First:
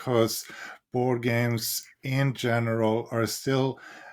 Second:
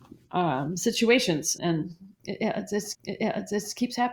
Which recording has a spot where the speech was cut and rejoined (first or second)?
second